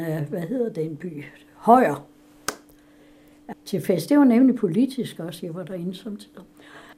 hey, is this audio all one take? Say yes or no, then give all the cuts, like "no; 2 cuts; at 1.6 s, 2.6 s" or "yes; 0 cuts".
no; 1 cut; at 3.5 s